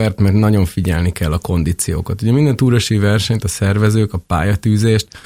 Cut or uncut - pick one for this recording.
uncut